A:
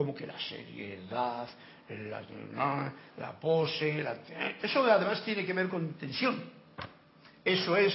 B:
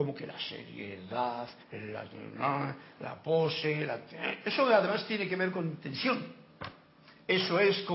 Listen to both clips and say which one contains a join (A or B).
B